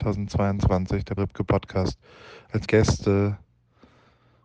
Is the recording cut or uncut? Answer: cut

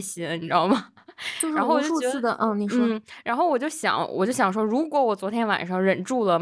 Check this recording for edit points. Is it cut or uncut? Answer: uncut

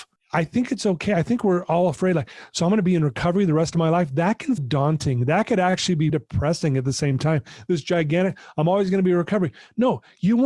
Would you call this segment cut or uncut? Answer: cut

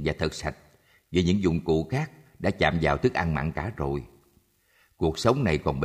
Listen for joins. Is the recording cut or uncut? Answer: uncut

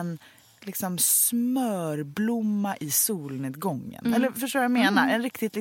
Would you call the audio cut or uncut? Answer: uncut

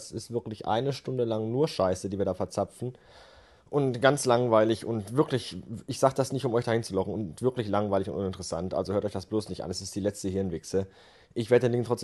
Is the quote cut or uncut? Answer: uncut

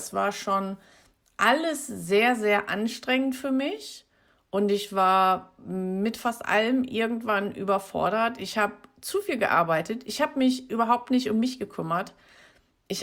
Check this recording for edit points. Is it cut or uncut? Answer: uncut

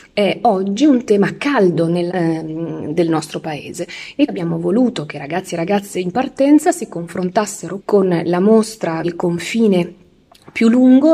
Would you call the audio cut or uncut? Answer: cut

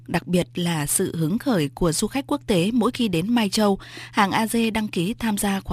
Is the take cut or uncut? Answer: uncut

